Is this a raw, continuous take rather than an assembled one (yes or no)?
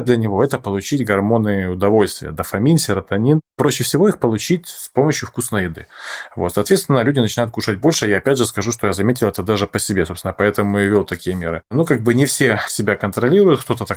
yes